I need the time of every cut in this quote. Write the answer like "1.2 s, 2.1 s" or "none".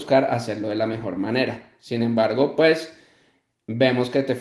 none